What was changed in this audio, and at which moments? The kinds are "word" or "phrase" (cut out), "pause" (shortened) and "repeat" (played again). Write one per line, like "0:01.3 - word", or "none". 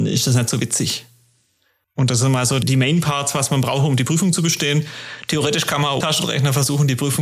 0:02.6 - word
0:06.0 - word